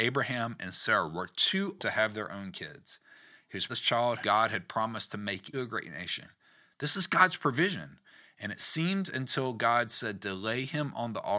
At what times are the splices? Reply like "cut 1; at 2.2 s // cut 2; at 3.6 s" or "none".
cut 1; at 1.8 s // cut 2; at 3.7 s // cut 3; at 4.2 s // cut 4; at 5.5 s